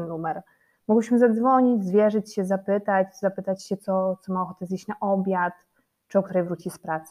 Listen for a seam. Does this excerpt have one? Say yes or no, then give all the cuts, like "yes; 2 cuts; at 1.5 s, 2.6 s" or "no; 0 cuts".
no; 0 cuts